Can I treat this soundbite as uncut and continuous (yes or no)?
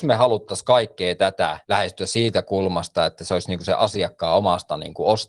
no